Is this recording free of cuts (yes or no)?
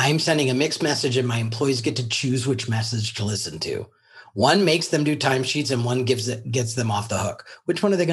yes